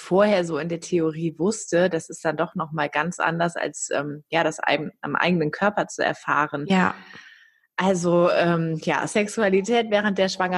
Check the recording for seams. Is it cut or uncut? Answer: uncut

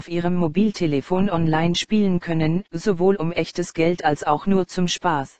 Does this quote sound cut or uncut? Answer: cut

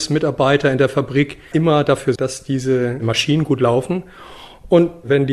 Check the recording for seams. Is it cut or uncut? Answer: cut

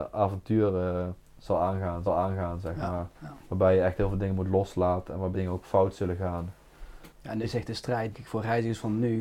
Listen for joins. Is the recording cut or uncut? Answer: cut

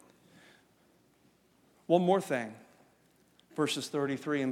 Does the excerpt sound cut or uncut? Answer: uncut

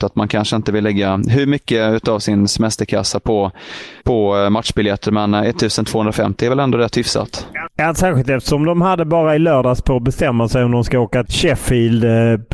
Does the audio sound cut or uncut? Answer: cut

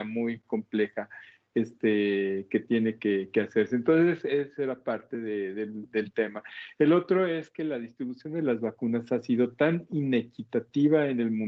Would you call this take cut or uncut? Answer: uncut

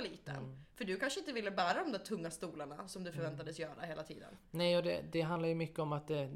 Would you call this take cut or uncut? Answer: uncut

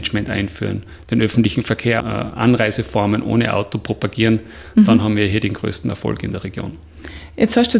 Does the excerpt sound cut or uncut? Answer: cut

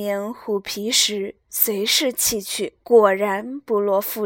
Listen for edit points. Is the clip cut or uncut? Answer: cut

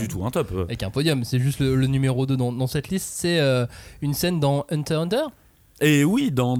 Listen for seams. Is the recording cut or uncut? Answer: uncut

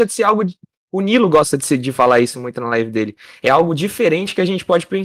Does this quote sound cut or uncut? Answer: uncut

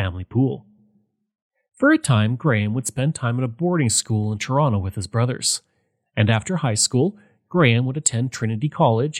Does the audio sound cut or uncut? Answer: uncut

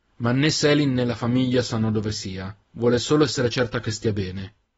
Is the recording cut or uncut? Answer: cut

